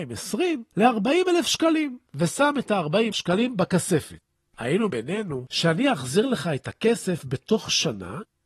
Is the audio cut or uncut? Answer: cut